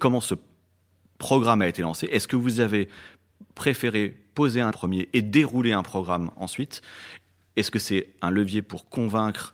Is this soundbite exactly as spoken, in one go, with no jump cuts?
no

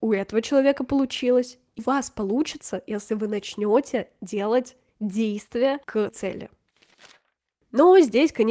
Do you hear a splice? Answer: yes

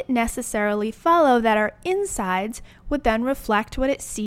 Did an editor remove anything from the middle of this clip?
no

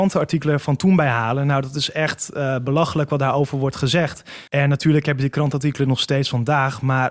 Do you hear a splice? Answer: yes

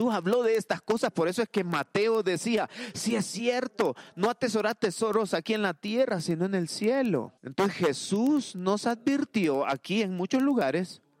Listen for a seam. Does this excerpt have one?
yes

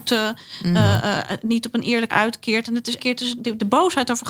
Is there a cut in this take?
yes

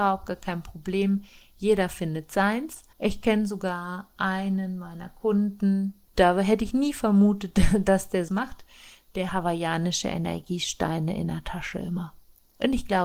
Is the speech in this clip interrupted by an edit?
yes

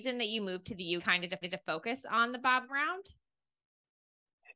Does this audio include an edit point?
yes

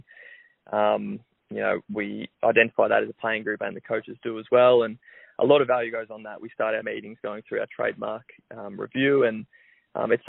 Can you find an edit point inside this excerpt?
yes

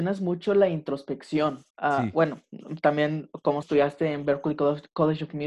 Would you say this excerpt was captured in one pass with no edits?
no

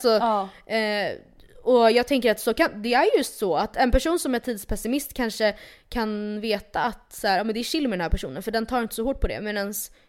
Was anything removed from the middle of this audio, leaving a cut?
no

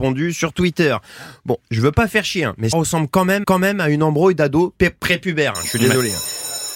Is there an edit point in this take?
yes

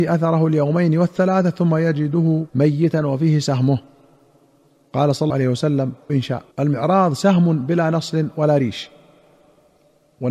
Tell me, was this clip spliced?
yes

